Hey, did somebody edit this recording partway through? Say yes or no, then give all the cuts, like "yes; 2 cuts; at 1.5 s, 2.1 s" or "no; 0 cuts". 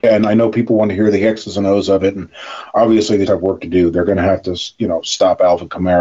yes; 1 cut; at 3.3 s